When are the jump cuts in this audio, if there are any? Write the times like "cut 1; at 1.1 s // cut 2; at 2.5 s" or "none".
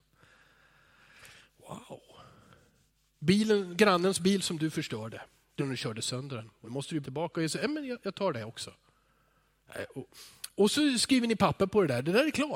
cut 1; at 5.6 s // cut 2; at 6.6 s // cut 3; at 7.0 s